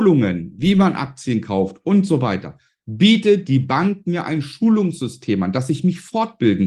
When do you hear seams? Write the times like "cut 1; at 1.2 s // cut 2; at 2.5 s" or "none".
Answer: none